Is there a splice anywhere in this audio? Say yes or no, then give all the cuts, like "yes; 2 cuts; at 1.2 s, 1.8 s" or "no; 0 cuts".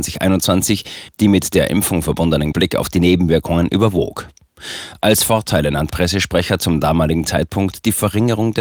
yes; 2 cuts; at 2.5 s, 5.9 s